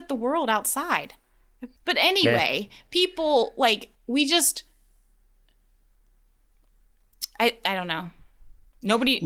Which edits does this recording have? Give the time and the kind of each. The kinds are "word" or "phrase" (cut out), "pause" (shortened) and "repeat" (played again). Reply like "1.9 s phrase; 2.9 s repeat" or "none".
1.8 s pause; 3.9 s pause